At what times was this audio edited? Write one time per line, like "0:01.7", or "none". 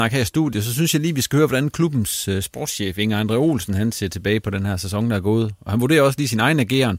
none

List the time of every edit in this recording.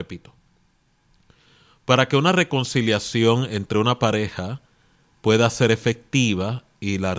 none

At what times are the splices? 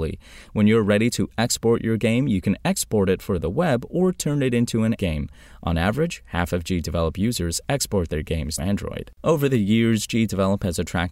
0:05.0
0:08.6
0:09.2

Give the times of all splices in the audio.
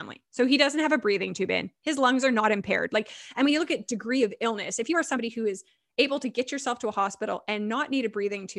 none

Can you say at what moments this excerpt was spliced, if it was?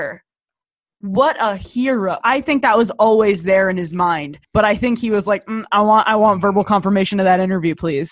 0:02.2
0:04.4

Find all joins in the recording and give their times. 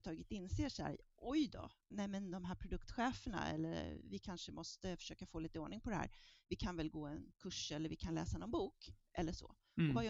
0:01.9
0:07.3

